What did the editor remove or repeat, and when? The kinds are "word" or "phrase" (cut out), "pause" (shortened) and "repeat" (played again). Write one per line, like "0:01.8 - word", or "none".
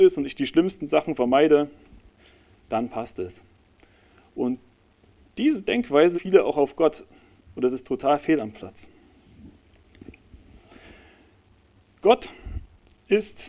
0:06.1 - word